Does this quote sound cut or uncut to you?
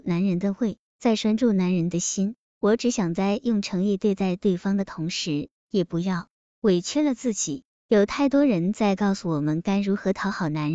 uncut